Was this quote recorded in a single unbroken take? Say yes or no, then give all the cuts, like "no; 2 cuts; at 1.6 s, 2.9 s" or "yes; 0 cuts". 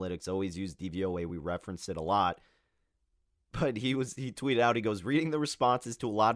yes; 0 cuts